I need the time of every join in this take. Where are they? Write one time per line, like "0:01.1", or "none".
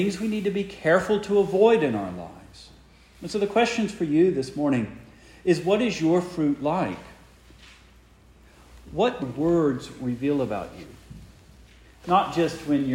0:09.2